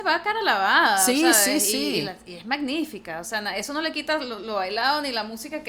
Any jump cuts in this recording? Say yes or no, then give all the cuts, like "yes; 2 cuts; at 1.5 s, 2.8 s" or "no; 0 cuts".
no; 0 cuts